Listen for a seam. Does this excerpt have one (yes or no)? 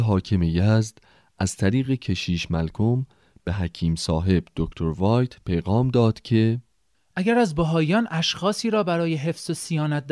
no